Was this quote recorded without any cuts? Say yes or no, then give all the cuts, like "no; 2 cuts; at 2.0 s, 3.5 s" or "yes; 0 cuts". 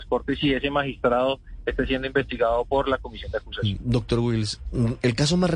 yes; 0 cuts